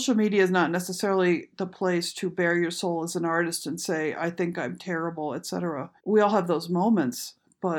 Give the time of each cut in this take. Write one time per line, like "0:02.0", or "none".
0:06.0